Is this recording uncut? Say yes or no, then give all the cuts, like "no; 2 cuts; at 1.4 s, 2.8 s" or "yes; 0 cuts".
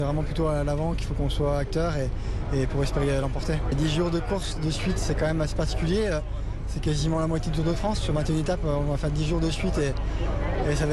yes; 0 cuts